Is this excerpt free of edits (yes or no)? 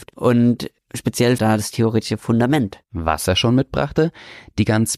no